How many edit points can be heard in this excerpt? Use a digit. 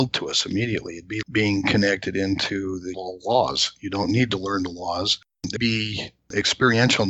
3